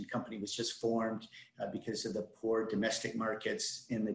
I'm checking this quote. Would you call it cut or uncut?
uncut